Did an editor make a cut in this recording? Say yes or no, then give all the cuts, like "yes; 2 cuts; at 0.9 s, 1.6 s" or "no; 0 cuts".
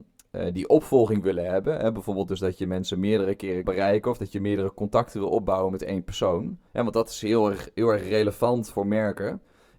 yes; 3 cuts; at 3.6 s, 6.7 s, 8.7 s